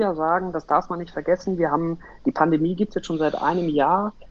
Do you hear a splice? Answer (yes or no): no